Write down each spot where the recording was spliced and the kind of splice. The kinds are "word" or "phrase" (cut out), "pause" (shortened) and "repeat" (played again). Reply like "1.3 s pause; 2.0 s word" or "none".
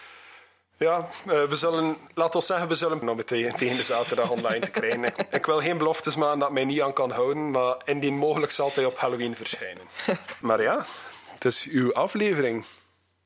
3.0 s word